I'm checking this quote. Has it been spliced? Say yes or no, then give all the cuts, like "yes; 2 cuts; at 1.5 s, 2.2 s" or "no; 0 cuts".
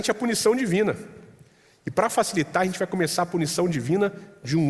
no; 0 cuts